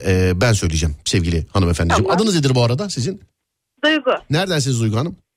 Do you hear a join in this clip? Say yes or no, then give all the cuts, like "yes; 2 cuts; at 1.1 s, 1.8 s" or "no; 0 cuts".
no; 0 cuts